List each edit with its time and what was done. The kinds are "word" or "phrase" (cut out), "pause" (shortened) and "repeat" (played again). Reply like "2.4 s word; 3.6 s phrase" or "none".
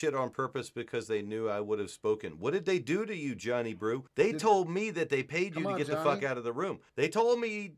4.1 s pause; 6.9 s pause